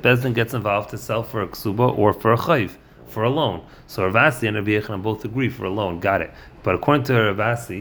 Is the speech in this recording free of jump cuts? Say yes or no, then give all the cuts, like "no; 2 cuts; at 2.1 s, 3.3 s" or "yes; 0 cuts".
yes; 0 cuts